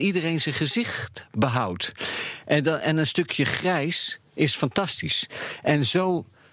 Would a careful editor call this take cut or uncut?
uncut